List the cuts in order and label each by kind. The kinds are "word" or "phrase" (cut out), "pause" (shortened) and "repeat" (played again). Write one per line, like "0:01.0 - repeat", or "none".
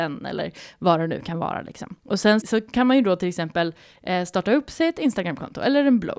0:02.0 - pause
0:02.4 - word